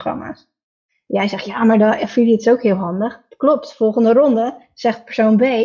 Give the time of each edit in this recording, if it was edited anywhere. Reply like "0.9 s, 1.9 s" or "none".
none

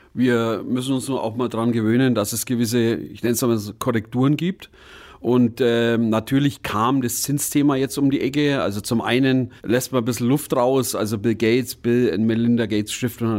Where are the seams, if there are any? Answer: 9.6 s

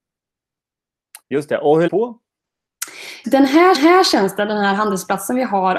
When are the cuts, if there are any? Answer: 1.2 s, 1.9 s, 3.2 s, 3.7 s

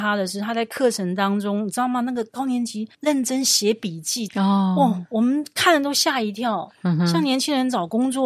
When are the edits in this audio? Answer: 2.9 s, 4.3 s

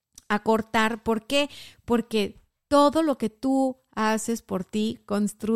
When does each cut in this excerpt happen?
none

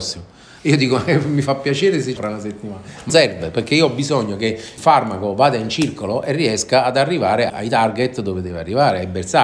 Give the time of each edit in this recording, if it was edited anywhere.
2.2 s, 3.1 s, 4.8 s, 7.5 s

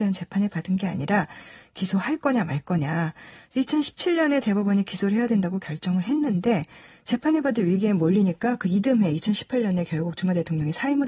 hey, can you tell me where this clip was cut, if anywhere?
none

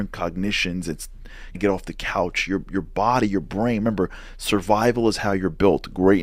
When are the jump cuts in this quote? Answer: 1.5 s

